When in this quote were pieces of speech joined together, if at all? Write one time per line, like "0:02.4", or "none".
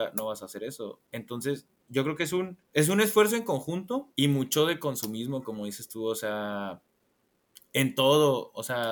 0:01.1
0:02.6
0:04.1